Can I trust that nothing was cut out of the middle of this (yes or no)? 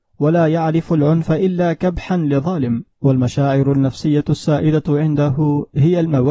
no